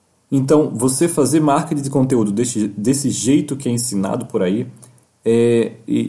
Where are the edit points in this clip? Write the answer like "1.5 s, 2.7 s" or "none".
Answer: none